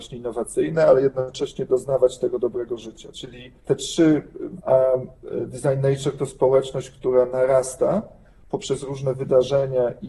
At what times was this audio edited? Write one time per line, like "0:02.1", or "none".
0:03.6
0:04.6